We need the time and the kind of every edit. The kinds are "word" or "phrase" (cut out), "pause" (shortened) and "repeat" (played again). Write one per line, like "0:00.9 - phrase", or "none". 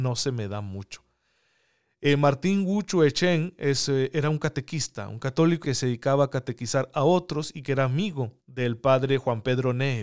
0:05.6 - word
0:08.4 - pause